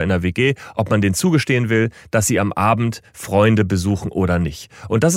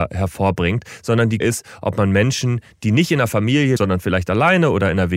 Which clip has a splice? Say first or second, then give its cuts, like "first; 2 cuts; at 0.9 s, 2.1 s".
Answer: second; 2 cuts; at 1.4 s, 3.8 s